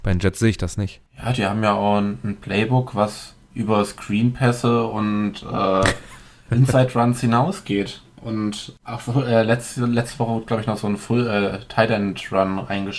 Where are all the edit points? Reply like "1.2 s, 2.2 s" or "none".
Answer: 1.1 s, 8.8 s